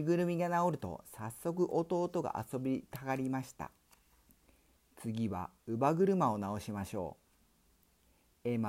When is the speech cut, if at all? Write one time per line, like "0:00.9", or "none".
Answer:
none